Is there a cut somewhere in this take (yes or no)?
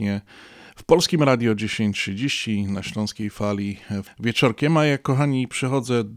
yes